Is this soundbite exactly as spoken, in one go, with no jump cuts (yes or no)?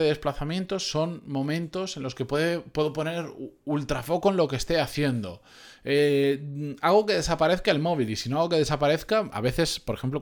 yes